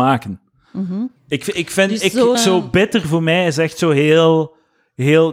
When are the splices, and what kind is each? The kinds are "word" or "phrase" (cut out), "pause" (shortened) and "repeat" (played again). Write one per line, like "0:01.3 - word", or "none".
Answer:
0:01.2 - pause
0:02.3 - word